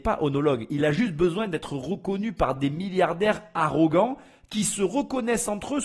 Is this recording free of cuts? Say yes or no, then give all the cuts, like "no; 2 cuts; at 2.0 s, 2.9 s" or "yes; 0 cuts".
yes; 0 cuts